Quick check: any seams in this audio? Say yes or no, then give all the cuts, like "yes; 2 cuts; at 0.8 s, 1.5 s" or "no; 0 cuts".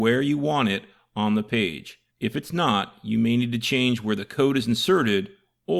yes; 1 cut; at 2.1 s